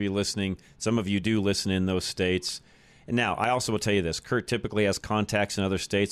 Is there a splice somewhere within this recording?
no; 0 cuts

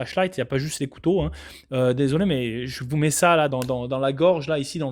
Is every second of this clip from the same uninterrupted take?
no; 1 cut; at 3.5 s

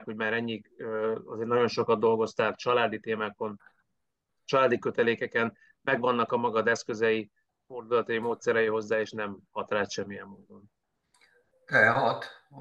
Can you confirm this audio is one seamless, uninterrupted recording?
yes; 0 cuts

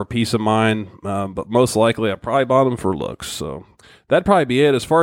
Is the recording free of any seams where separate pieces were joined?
yes; 0 cuts

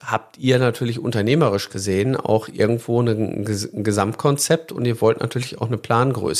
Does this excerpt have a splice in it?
no; 0 cuts

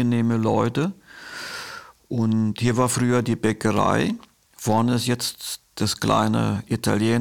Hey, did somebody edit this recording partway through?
no; 0 cuts

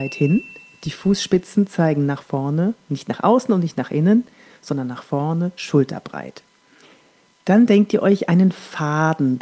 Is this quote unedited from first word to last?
yes; 0 cuts

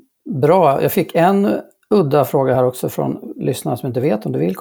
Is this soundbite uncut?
yes; 0 cuts

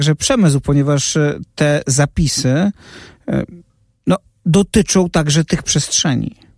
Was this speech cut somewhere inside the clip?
no; 0 cuts

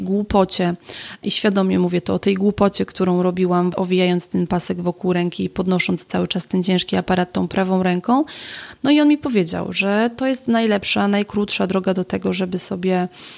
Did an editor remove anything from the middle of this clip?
yes; 1 cut; at 3.7 s

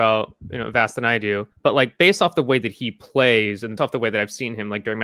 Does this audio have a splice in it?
yes; 2 cuts; at 1.5 s, 3.8 s

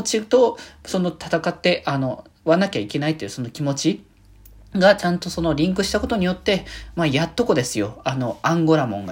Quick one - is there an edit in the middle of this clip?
no; 0 cuts

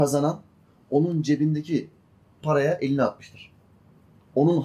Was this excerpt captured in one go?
yes; 0 cuts

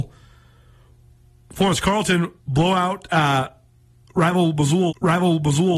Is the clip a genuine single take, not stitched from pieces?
no; 2 cuts; at 2.4 s, 4.9 s

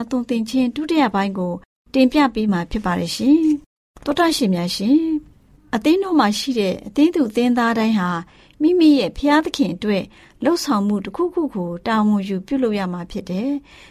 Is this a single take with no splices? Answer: yes; 0 cuts

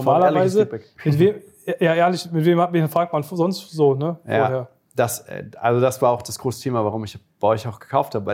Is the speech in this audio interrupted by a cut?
no; 0 cuts

